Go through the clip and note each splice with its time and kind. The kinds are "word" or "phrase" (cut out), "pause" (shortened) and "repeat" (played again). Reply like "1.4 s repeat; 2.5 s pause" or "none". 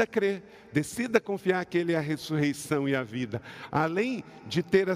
none